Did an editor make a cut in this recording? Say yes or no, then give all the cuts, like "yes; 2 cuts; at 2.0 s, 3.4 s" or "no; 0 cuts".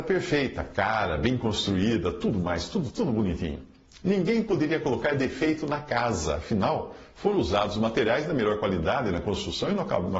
no; 0 cuts